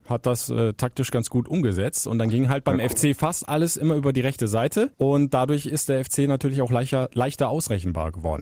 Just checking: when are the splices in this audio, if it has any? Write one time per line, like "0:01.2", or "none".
0:04.9